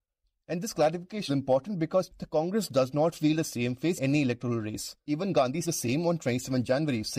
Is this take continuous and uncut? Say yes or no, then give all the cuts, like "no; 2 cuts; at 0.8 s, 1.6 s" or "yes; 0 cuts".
no; 4 cuts; at 1.3 s, 2.1 s, 4.0 s, 5.6 s